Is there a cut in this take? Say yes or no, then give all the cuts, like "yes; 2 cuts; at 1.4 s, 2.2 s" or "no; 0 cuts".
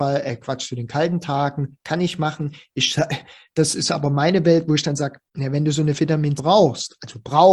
yes; 2 cuts; at 5.3 s, 6.4 s